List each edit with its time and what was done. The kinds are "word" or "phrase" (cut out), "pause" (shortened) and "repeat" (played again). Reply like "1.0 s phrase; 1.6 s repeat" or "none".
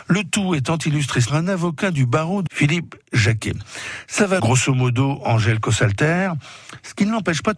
1.3 s phrase; 2.5 s word; 4.4 s phrase